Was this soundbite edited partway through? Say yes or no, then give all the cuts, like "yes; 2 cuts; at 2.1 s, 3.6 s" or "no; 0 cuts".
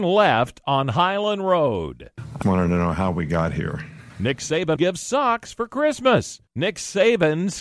yes; 3 cuts; at 2.4 s, 4.8 s, 6.5 s